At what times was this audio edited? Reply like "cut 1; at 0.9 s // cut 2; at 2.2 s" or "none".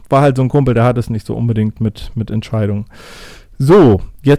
none